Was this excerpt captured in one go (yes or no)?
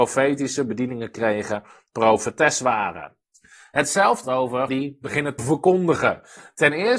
no